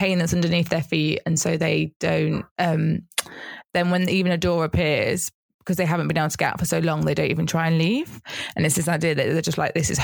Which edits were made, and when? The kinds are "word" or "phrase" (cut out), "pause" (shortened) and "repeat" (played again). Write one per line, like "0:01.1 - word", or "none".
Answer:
0:02.5 - pause
0:05.4 - pause